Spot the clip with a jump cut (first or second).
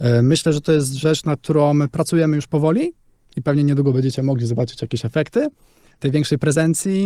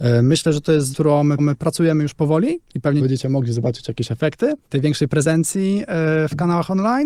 second